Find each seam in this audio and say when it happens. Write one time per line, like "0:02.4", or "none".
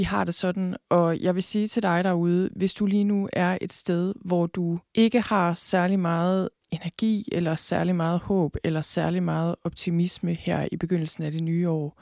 0:04.9